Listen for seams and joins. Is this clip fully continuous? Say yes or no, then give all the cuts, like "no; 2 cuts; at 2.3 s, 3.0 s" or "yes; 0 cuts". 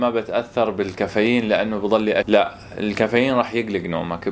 no; 1 cut; at 2.2 s